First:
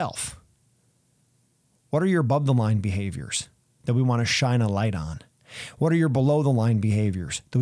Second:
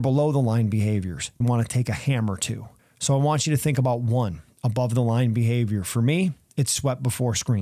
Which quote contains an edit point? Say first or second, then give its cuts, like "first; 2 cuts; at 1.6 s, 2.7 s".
second; 2 cuts; at 1.4 s, 2.8 s